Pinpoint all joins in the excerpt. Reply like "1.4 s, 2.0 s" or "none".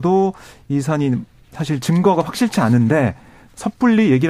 none

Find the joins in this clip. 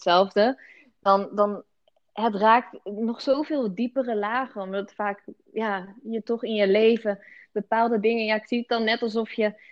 none

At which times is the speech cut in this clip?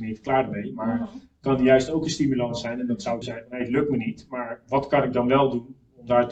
3.2 s

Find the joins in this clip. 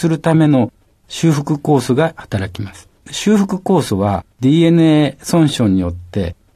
3.0 s, 4.3 s

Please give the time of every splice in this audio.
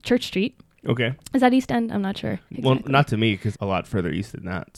2.5 s, 3.5 s

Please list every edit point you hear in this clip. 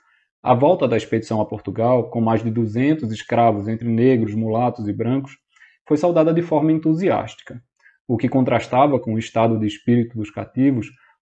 none

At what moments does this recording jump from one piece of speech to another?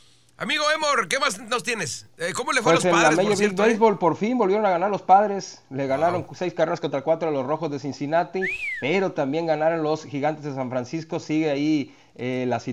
none

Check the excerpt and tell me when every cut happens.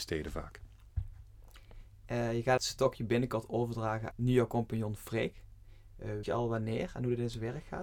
2.6 s, 4.1 s, 6.2 s

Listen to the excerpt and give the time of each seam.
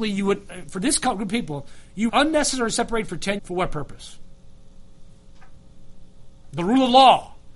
2.1 s, 3.1 s, 3.4 s

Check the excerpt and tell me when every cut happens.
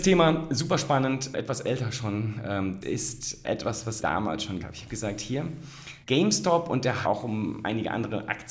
1.3 s, 2.8 s, 3.4 s, 4.0 s, 4.6 s, 6.0 s, 7.0 s

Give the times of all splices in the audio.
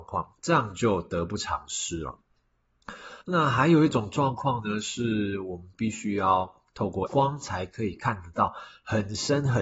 3.2 s, 7.1 s

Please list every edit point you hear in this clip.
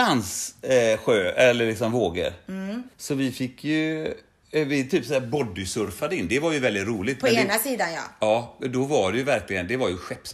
2.9 s

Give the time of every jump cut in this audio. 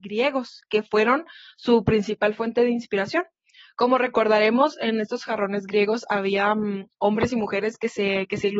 none

